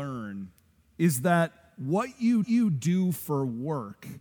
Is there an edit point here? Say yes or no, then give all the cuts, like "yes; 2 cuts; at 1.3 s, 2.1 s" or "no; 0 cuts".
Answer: yes; 1 cut; at 2.4 s